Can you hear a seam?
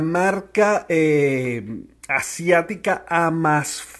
no; 0 cuts

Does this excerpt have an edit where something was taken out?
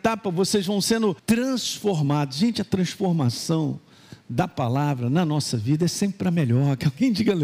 yes; 1 cut; at 1.2 s

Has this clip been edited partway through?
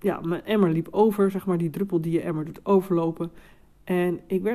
no; 0 cuts

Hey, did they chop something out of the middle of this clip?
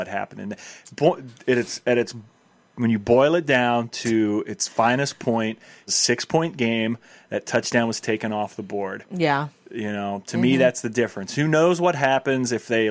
yes; 1 cut; at 5.9 s

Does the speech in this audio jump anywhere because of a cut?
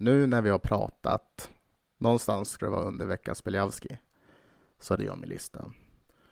yes; 2 cuts; at 2.6 s, 5.0 s

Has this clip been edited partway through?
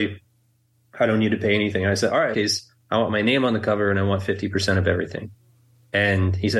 yes; 1 cut; at 2.3 s

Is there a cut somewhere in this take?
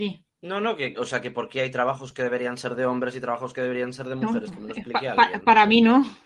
no; 0 cuts

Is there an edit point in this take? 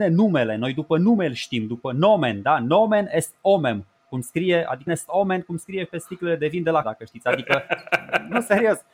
yes; 2 cuts; at 4.9 s, 6.8 s

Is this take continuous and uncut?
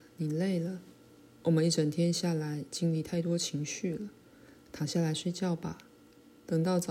yes; 0 cuts

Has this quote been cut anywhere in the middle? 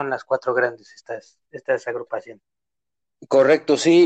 no; 0 cuts

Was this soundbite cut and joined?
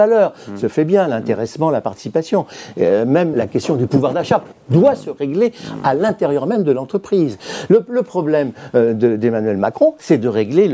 yes; 1 cut; at 3.3 s

